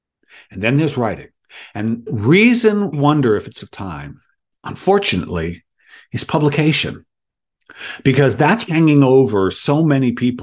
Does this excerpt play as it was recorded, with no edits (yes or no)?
no